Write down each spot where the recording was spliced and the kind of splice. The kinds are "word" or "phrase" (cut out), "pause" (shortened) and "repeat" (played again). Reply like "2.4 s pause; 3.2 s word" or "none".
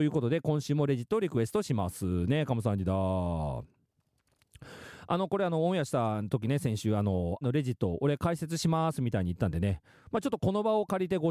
7.4 s word